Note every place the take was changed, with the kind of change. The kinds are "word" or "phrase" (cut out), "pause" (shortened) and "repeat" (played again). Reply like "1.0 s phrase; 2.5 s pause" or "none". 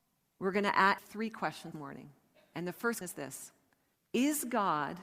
1.0 s word; 1.7 s word; 3.0 s word; 3.9 s pause